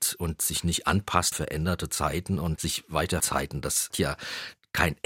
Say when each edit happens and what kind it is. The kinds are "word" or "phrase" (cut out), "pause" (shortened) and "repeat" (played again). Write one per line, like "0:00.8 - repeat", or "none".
0:01.3 - word
0:02.6 - word
0:03.2 - word
0:03.9 - word